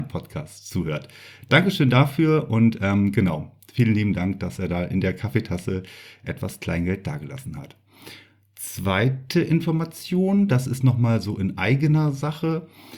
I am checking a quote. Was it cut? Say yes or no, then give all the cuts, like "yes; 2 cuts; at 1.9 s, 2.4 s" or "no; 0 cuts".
no; 0 cuts